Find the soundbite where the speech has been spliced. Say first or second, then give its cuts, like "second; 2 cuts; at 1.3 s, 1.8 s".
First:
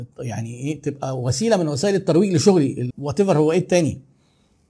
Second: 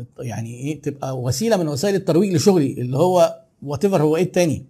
first; 1 cut; at 2.9 s